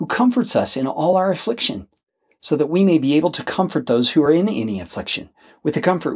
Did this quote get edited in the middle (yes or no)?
no